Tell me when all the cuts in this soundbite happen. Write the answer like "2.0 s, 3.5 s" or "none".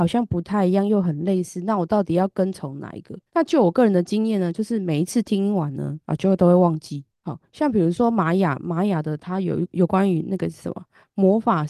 3.3 s, 6.0 s, 7.1 s